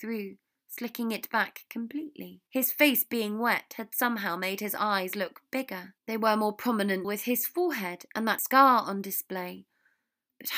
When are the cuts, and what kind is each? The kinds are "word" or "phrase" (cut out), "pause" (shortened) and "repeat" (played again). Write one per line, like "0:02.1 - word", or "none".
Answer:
0:02.5 - pause
0:06.0 - pause
0:07.0 - word
0:08.4 - word